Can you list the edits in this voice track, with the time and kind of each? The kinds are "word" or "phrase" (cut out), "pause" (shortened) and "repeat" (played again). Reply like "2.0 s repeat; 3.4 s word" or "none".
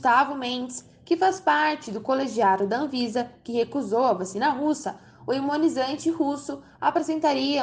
none